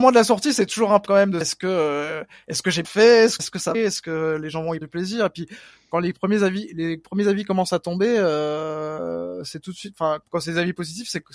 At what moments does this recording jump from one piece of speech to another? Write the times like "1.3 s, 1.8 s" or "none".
1.1 s, 1.4 s, 2.8 s, 3.4 s, 3.7 s, 4.8 s, 10.2 s